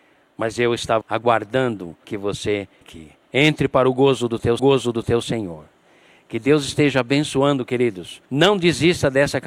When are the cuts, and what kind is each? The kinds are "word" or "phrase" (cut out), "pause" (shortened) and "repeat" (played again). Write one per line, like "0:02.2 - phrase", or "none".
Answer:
0:01.0 - word
0:02.0 - phrase
0:02.8 - word
0:04.6 - repeat
0:08.3 - pause